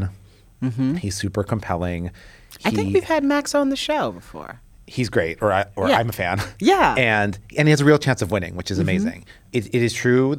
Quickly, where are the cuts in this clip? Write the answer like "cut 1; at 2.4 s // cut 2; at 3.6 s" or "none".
none